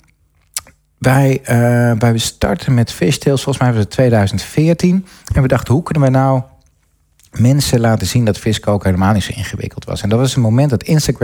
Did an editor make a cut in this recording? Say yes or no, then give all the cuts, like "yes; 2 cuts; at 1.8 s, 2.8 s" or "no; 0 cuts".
no; 0 cuts